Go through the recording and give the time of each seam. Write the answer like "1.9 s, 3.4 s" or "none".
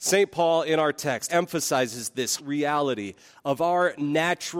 1.3 s, 2.4 s

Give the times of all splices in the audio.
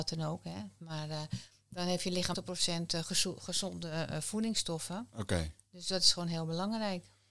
2.3 s

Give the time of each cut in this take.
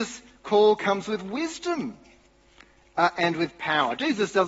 none

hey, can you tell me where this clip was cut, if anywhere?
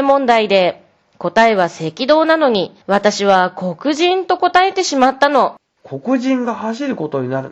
2.8 s

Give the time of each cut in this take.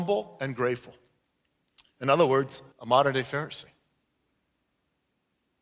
2.7 s

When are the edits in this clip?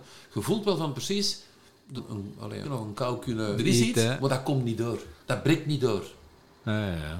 2.0 s, 2.6 s, 3.6 s, 5.2 s

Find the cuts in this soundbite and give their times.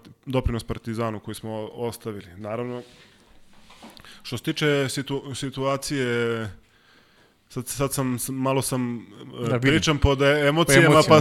none

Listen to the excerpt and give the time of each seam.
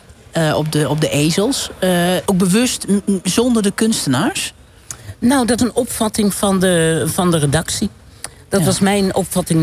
2.3 s, 5.6 s

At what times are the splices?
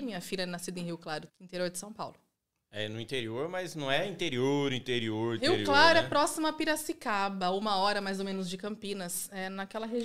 1.3 s

